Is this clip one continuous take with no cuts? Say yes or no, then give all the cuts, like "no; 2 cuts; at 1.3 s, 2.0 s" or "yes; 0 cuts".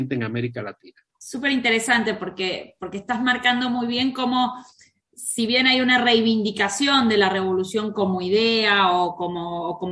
no; 1 cut; at 1.1 s